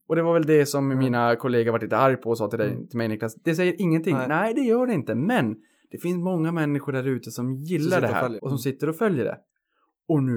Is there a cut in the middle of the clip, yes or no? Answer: yes